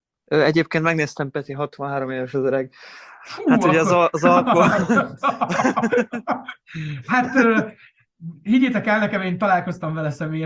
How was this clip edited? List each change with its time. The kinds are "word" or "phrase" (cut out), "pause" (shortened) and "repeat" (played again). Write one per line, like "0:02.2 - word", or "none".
none